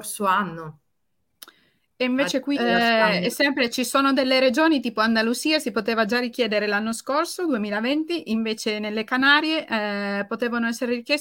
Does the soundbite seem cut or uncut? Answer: cut